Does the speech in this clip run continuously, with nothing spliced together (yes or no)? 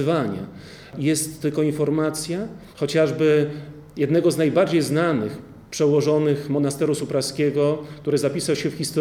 no